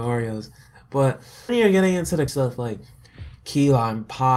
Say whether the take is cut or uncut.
cut